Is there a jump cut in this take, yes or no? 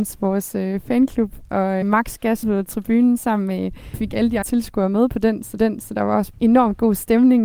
yes